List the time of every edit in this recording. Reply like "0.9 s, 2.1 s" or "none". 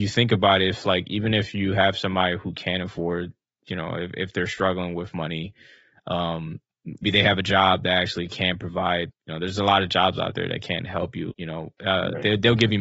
7.0 s, 9.1 s, 11.3 s